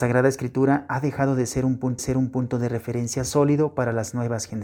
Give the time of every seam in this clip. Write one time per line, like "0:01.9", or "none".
0:02.0